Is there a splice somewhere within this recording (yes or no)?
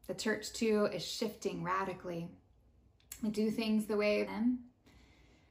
yes